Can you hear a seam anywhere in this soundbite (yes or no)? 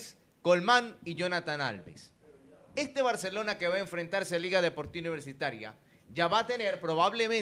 no